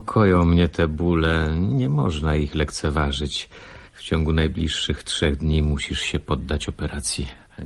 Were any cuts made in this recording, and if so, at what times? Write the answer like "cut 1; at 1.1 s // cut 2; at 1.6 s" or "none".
cut 1; at 3.9 s